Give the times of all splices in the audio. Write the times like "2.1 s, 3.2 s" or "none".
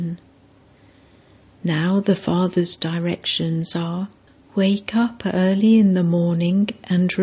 4.3 s